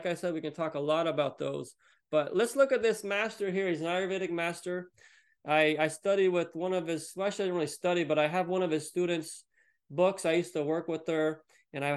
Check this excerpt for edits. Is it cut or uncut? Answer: uncut